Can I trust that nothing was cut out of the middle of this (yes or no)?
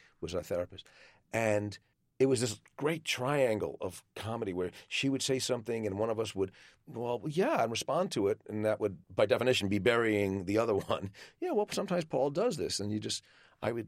no